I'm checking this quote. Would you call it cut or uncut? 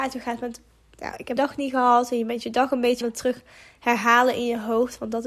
cut